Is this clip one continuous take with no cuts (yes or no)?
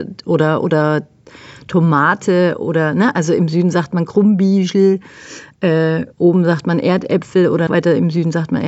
no